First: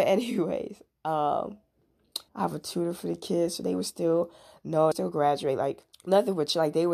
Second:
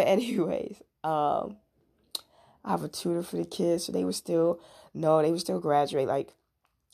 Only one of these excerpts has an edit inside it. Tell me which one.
first; 3 cuts; at 2.3 s, 4.9 s, 5.9 s

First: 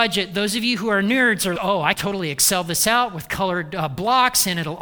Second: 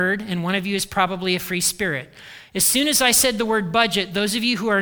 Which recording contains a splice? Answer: first; 2 cuts; at 1.6 s, 1.9 s

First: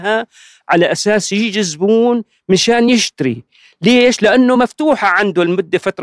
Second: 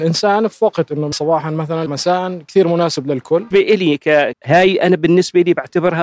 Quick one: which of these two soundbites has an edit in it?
second; 4 cuts; at 1.1 s, 1.9 s, 3.5 s, 4.3 s

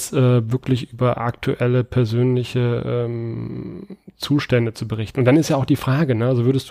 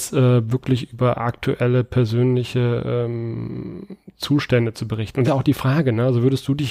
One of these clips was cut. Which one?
second; 1 cut; at 5.2 s

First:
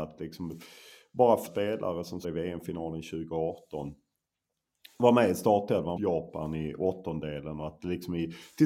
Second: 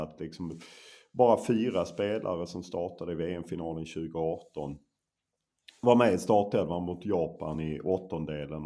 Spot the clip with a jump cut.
first; 3 cuts; at 1.5 s, 2.2 s, 6.0 s

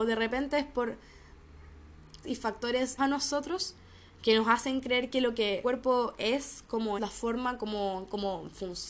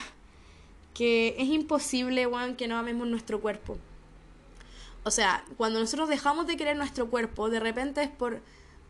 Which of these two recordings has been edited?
first; 4 cuts; at 2.2 s, 3.0 s, 5.6 s, 7.0 s

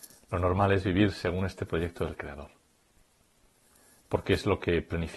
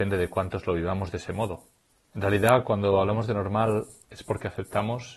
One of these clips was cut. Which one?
second; 1 cut; at 1.9 s

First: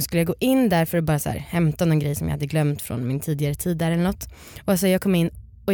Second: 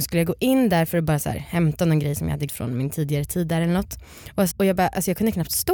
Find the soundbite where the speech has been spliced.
second; 2 cuts; at 2.5 s, 4.5 s

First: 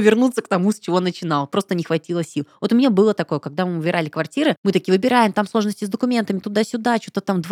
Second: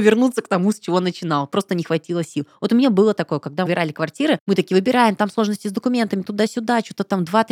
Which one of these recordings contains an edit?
second; 1 cut; at 3.7 s

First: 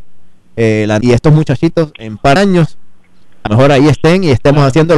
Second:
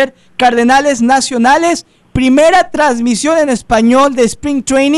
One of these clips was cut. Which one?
first; 3 cuts; at 1.0 s, 2.4 s, 3.5 s

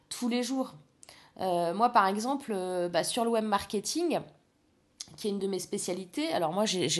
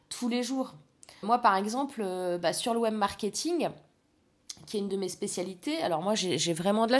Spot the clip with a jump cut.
second; 1 cut; at 1.2 s

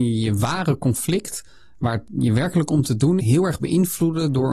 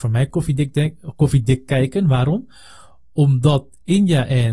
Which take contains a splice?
first; 1 cut; at 3.2 s

